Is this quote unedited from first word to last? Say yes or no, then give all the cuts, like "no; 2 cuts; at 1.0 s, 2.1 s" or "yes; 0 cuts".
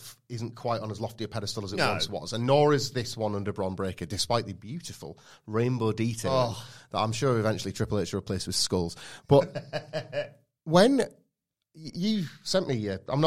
yes; 0 cuts